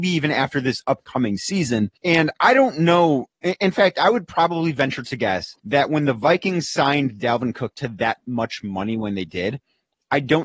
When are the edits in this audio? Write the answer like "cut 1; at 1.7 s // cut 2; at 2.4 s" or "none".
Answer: cut 1; at 2.0 s // cut 2; at 5.6 s